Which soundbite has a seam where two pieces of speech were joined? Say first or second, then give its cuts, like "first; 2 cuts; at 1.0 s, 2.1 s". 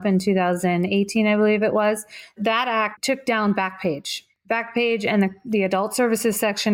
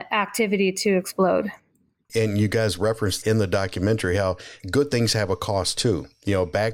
second; 1 cut; at 3.2 s